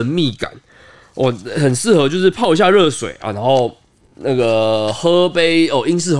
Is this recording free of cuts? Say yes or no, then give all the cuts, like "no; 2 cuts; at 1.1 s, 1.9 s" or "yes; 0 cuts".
yes; 0 cuts